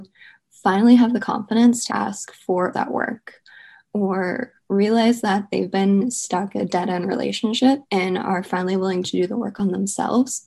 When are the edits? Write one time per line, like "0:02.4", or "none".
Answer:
0:01.9
0:02.7
0:06.6
0:07.8